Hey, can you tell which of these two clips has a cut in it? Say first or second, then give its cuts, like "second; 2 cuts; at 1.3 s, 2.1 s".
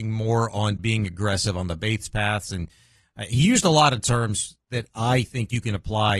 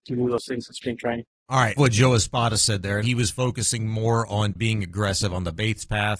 second; 2 cuts; at 1.8 s, 3.0 s